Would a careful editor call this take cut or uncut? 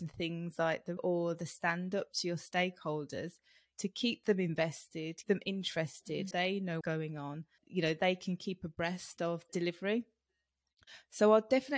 cut